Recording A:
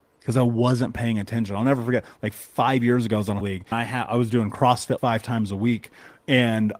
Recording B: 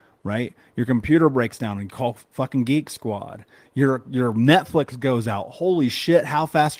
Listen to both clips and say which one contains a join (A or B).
A